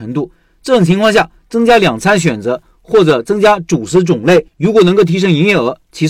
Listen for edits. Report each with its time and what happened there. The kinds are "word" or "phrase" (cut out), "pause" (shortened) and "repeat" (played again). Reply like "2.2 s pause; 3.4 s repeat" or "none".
4.5 s pause